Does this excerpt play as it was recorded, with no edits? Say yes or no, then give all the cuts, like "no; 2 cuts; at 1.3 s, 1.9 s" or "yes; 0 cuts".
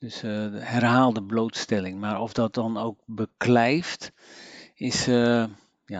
yes; 0 cuts